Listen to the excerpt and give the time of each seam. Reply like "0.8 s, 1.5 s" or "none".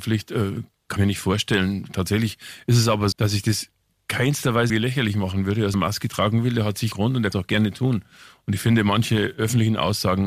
1.0 s, 3.1 s, 4.7 s, 5.7 s, 6.9 s, 7.3 s